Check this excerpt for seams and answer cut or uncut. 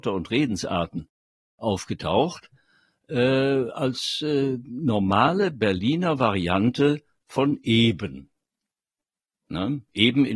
uncut